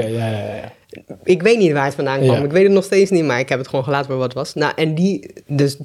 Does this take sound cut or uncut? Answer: uncut